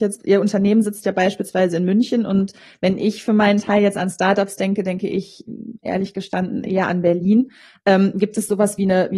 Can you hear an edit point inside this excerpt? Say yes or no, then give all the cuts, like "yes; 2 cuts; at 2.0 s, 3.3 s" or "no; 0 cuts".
no; 0 cuts